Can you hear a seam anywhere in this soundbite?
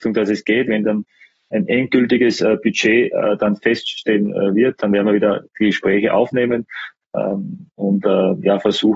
no; 0 cuts

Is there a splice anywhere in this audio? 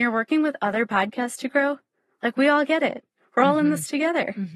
no; 0 cuts

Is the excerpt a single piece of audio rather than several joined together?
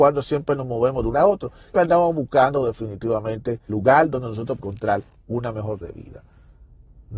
no; 5 cuts; at 1.1 s, 1.7 s, 3.7 s, 4.6 s, 5.8 s

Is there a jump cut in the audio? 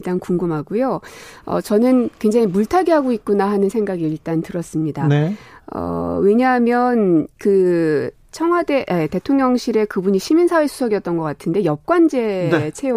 no; 0 cuts

